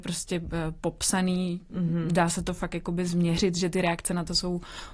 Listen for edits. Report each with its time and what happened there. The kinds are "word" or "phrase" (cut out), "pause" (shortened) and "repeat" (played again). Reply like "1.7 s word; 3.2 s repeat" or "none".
none